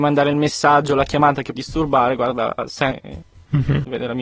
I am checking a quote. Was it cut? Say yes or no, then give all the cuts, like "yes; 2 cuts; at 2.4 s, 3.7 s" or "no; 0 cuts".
yes; 2 cuts; at 1.6 s, 2.9 s